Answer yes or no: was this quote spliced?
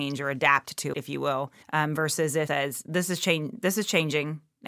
yes